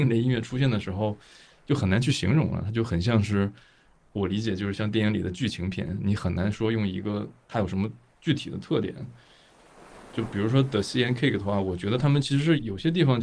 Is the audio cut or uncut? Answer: uncut